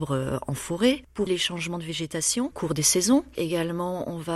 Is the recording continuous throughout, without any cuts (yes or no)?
no